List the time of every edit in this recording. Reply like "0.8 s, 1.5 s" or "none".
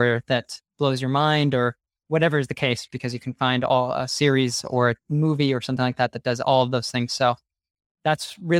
none